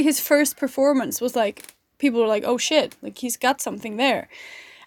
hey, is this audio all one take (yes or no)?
yes